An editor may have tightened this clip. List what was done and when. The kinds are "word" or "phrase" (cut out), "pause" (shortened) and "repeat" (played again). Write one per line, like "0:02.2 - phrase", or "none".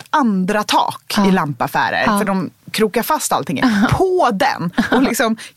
none

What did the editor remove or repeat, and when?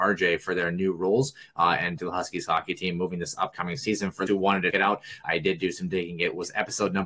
0:02.0 - phrase
0:04.3 - word
0:04.7 - word
0:05.2 - word

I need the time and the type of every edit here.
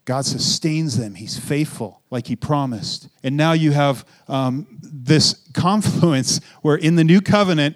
0:02.1 - pause
0:03.1 - pause

